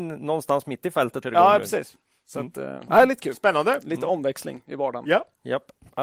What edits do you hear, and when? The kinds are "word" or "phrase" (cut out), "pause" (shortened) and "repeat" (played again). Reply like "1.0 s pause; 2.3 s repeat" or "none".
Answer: 1.2 s phrase; 2.9 s word